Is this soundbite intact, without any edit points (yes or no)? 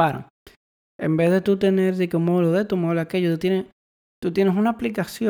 yes